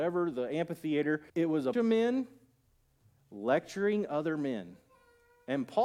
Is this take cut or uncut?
cut